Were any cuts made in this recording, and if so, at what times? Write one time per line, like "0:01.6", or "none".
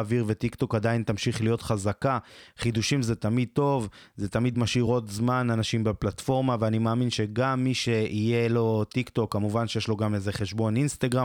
none

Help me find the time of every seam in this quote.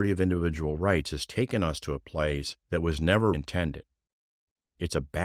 0:02.6
0:03.3

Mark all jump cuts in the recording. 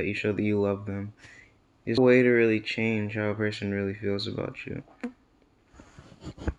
0:02.0

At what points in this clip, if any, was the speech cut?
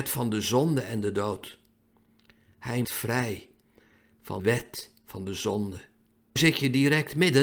0:02.8
0:04.4
0:06.4

